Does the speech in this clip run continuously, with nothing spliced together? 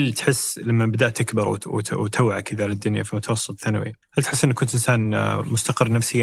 no; 1 cut; at 4.0 s

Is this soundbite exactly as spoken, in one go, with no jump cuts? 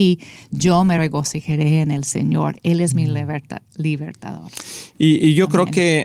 yes; 0 cuts

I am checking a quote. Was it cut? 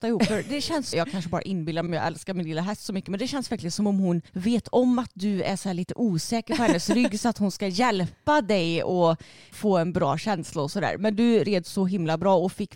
yes; 4 cuts; at 0.9 s, 1.9 s, 4.3 s, 9.5 s

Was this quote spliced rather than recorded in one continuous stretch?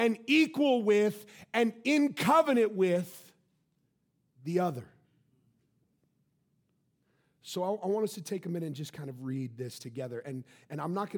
no; 0 cuts

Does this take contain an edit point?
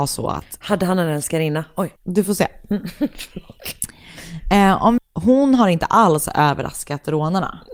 yes; 2 cuts; at 2.0 s, 5.0 s

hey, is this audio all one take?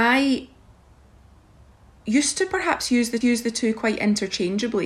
no; 1 cut; at 3.2 s

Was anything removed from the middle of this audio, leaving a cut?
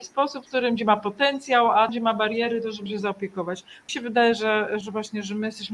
yes; 4 cuts; at 1.9 s, 2.9 s, 3.9 s, 4.8 s

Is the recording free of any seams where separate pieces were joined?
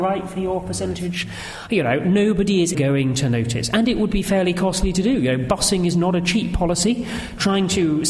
no; 1 cut; at 2.7 s

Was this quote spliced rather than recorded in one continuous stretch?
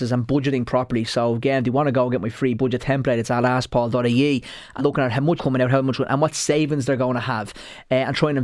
yes; 3 cuts; at 2.6 s, 4.8 s, 5.4 s

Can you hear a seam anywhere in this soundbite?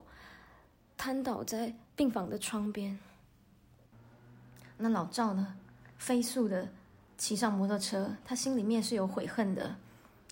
yes; 1 cut; at 1.9 s

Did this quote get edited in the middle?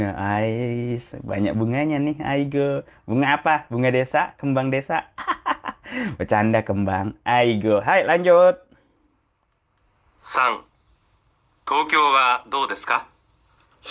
no; 0 cuts

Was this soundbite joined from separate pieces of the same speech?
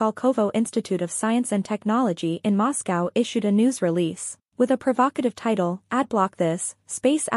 no; 0 cuts

